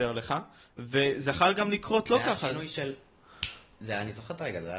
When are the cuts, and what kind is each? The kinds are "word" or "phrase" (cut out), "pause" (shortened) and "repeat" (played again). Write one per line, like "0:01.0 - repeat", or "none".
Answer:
none